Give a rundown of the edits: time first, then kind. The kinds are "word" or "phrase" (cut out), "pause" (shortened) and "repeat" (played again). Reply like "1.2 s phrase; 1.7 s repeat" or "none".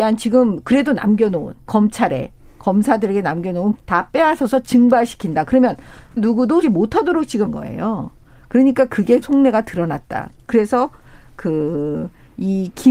1.7 s word; 3.7 s word; 6.2 s word; 6.6 s word; 7.5 s word; 9.2 s word